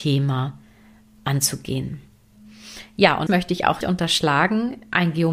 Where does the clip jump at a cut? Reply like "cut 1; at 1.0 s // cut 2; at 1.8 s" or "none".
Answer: cut 1; at 3.3 s // cut 2; at 3.8 s